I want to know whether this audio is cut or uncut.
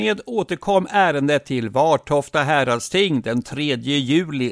uncut